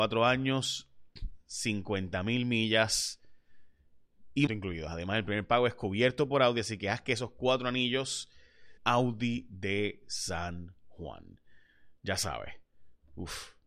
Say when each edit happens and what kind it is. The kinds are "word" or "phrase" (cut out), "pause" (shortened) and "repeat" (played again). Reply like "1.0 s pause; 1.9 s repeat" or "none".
4.5 s word; 8.8 s phrase